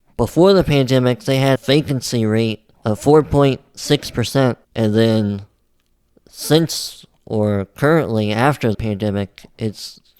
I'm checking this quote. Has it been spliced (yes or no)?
yes